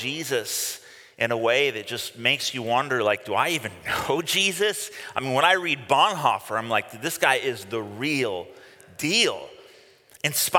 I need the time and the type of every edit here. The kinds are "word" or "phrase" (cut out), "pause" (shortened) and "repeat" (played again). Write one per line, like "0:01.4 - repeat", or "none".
none